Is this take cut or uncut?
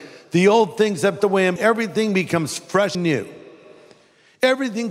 cut